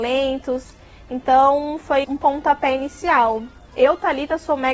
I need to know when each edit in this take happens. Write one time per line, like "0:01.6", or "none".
0:02.0